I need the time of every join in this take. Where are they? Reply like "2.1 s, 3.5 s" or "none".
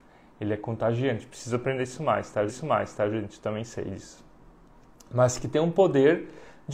2.5 s